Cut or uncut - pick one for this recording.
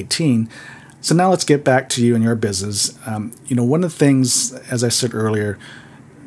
uncut